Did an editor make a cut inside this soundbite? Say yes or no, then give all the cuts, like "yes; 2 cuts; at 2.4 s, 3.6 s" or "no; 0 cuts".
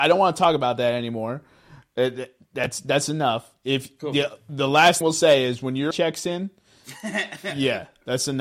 yes; 2 cuts; at 5.0 s, 5.9 s